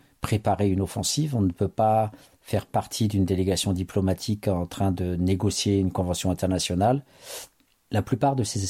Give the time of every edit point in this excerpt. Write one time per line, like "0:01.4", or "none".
none